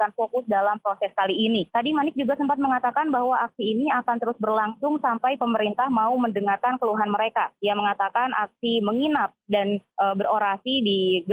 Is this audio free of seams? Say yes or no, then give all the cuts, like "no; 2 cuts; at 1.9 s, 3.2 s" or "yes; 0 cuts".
no; 3 cuts; at 1.7 s, 7.6 s, 9.9 s